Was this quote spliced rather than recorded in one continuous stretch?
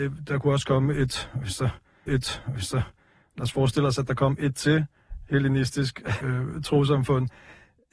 yes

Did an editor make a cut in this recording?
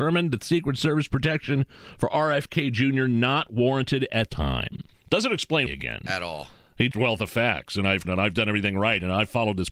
yes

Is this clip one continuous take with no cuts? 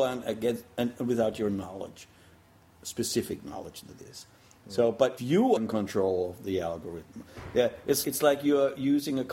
no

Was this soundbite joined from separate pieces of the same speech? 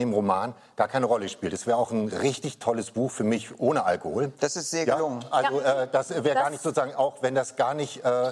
no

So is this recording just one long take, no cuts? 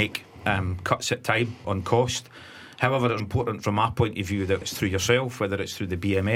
no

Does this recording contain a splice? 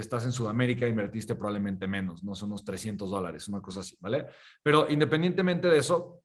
no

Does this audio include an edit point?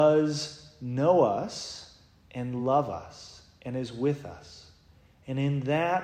no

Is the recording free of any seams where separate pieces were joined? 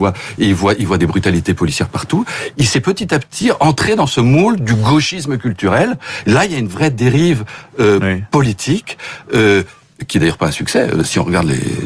yes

